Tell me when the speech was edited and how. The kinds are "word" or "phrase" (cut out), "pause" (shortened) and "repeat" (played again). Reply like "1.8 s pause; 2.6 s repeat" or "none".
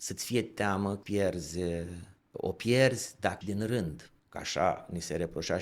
1.0 s word; 2.2 s pause; 3.4 s word; 4.2 s pause